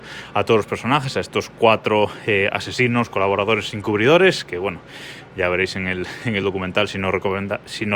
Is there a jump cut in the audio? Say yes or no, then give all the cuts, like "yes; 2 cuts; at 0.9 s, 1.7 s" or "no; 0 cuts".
no; 0 cuts